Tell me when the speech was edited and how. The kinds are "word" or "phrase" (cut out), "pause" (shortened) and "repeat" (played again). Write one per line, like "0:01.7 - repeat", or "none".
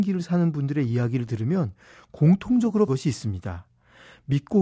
0:02.9 - phrase